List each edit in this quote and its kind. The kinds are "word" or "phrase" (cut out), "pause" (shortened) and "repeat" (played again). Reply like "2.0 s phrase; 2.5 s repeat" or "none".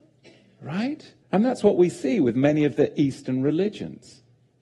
1.2 s pause